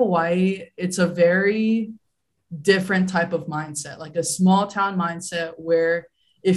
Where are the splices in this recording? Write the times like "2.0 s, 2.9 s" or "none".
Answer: none